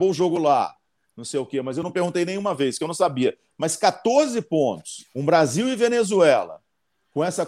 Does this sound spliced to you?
yes; 1 cut; at 5.1 s

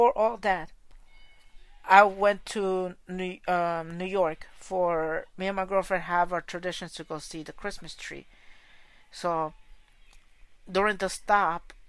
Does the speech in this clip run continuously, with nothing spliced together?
yes; 0 cuts

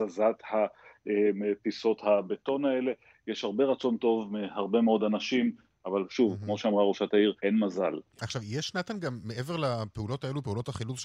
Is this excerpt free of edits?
no; 1 cut; at 7.4 s

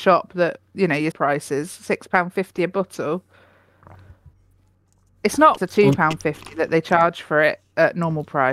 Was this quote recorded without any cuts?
no; 2 cuts; at 1.1 s, 5.6 s

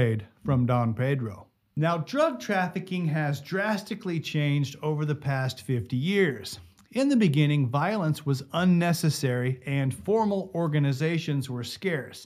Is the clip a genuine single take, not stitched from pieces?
yes; 0 cuts

